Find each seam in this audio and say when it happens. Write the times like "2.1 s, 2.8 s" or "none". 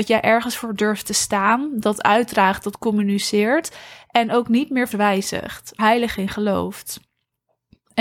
4.9 s, 5.8 s